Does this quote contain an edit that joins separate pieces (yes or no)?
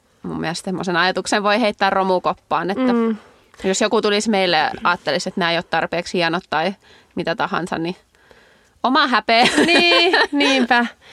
no